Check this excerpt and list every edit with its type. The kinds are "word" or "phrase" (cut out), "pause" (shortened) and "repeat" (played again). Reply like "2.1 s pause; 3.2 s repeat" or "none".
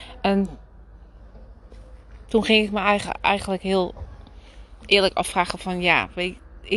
none

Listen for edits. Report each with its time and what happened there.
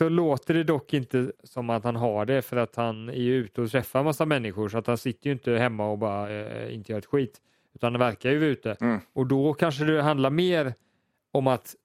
1.4 s pause

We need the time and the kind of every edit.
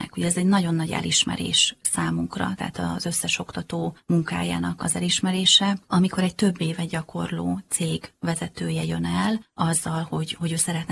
5.8 s pause

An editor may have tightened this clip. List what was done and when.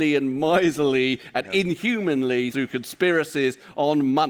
2.5 s phrase

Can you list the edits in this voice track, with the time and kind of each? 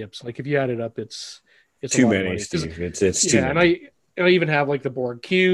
none

